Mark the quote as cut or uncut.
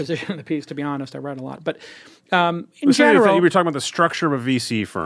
uncut